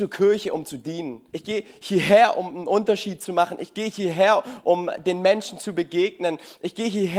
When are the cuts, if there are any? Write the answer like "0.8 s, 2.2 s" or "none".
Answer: 1.3 s